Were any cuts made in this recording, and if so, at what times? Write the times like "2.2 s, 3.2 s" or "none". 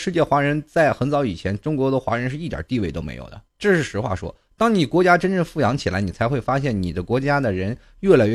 3.5 s